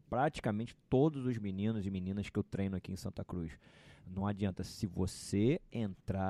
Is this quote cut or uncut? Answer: uncut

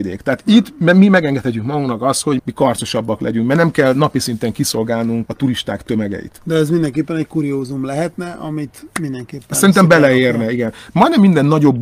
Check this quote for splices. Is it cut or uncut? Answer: cut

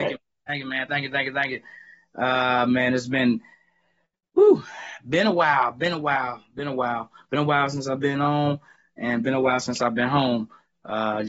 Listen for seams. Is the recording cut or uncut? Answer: uncut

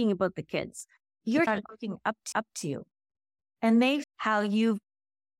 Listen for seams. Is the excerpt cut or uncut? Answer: cut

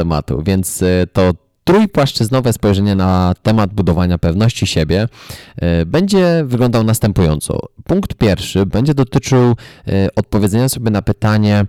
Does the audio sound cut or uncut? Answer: uncut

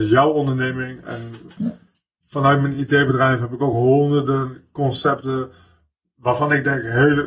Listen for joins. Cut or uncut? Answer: uncut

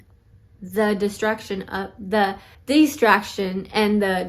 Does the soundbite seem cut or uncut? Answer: cut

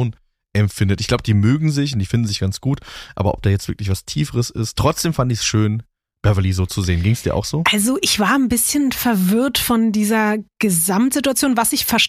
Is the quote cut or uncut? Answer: uncut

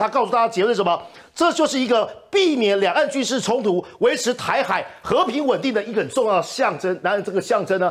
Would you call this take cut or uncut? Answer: uncut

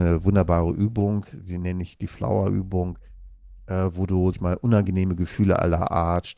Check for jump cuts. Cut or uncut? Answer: cut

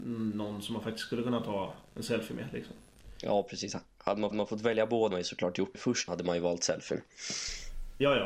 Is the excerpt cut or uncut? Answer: cut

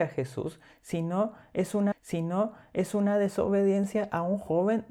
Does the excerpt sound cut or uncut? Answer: cut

